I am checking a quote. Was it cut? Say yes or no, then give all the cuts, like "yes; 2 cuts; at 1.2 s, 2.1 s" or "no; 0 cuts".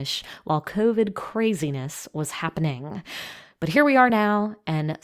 no; 0 cuts